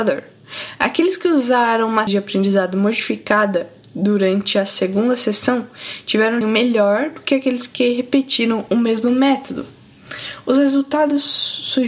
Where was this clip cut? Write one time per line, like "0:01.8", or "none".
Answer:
0:02.1
0:06.4